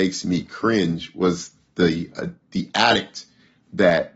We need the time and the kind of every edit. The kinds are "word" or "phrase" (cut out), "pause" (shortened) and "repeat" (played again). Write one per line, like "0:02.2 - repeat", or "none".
none

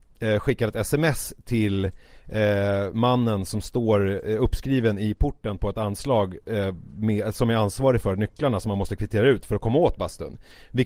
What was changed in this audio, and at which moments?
none

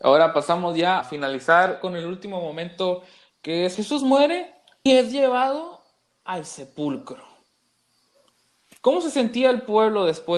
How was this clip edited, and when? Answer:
0:01.0 - word
0:03.7 - word
0:04.9 - word

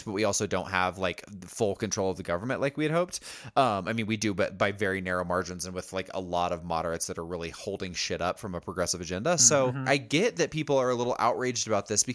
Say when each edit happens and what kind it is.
none

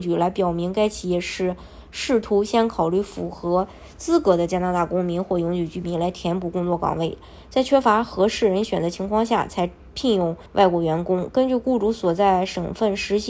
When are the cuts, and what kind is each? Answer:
0:10.5 - pause

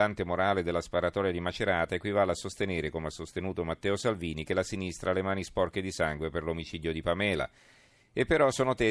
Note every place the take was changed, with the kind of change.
none

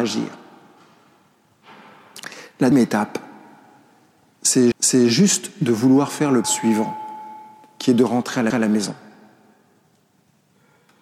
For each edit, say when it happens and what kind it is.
0:02.7 - word
0:04.7 - repeat
0:06.4 - word
0:08.5 - repeat

